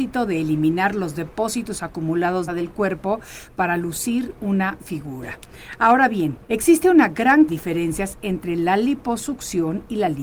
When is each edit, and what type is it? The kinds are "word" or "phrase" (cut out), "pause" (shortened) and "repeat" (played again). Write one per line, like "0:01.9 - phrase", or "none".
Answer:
0:02.5 - phrase
0:04.8 - word
0:06.4 - pause
0:07.5 - phrase